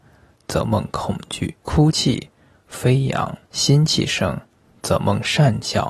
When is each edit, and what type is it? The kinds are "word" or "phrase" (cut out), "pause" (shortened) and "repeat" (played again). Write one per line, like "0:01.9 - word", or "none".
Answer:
0:01.6 - pause
0:03.4 - pause